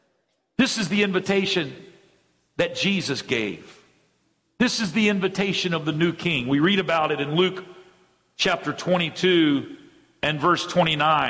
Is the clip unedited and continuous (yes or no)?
yes